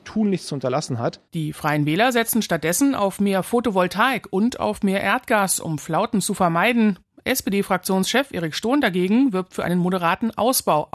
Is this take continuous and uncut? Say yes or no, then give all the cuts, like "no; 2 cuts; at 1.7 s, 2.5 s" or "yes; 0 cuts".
yes; 0 cuts